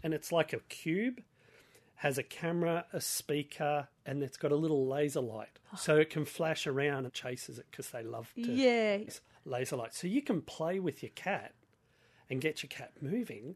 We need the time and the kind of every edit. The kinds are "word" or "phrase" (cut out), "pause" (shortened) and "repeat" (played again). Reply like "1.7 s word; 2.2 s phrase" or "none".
5.6 s pause; 7.1 s phrase; 9.1 s word